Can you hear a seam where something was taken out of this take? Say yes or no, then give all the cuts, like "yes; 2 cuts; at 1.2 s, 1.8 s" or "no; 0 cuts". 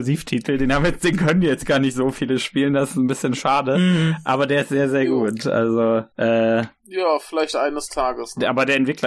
yes; 1 cut; at 6.1 s